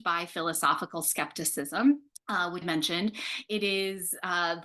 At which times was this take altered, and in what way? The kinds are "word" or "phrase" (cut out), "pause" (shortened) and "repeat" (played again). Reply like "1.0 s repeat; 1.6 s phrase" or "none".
2.1 s pause; 2.6 s word